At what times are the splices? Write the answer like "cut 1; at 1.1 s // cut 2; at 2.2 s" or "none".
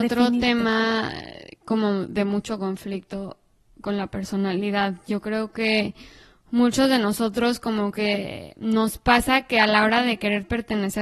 none